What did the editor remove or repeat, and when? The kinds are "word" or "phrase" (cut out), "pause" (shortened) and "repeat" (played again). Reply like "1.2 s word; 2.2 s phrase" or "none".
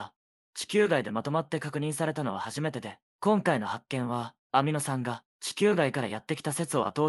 3.1 s pause; 4.4 s pause